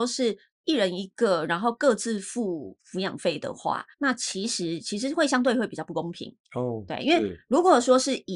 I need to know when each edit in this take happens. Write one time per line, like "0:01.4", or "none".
0:03.9
0:06.4

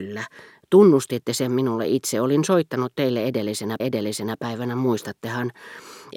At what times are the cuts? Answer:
0:03.8

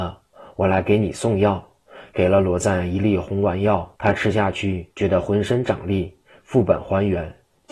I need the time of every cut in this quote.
0:03.9
0:04.9

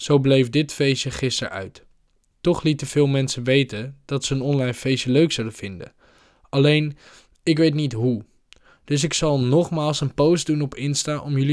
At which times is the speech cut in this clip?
none

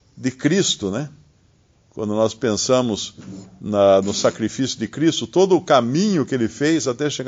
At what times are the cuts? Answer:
none

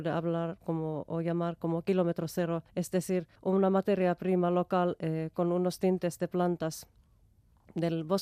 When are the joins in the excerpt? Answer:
0:02.7
0:03.3

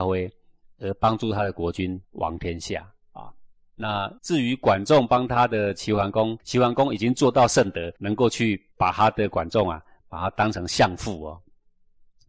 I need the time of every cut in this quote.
0:02.0
0:04.2
0:06.4
0:08.0
0:08.7

